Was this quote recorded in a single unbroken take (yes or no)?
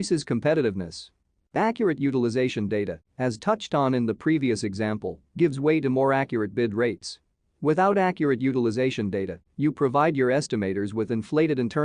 yes